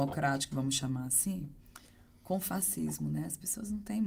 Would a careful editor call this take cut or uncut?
uncut